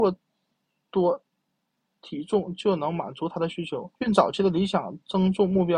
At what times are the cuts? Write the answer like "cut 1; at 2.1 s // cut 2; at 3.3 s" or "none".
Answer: cut 1; at 4.0 s